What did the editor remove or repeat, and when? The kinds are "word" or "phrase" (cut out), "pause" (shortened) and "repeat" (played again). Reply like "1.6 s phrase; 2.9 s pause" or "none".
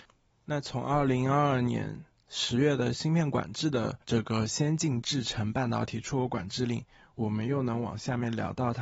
4.0 s pause